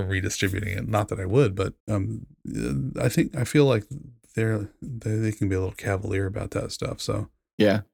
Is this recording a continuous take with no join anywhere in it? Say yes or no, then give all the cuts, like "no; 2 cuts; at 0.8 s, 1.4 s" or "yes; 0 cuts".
no; 1 cut; at 1.8 s